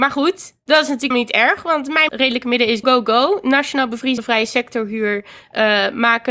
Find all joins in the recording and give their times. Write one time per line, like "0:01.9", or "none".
0:01.1
0:02.1
0:02.8
0:04.2